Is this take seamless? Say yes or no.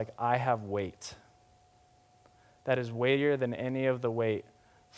yes